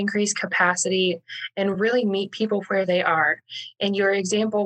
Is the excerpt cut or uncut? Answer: uncut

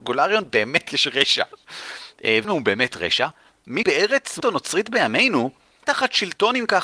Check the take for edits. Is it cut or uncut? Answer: cut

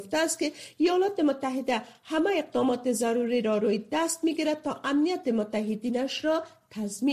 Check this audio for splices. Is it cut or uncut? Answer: uncut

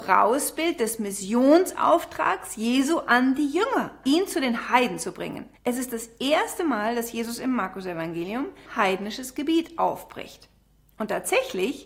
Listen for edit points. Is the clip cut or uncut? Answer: cut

